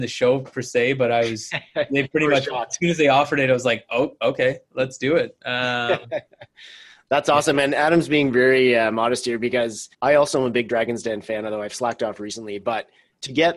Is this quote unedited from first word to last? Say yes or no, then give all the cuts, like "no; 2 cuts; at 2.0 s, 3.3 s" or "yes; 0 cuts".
no; 1 cut; at 9.9 s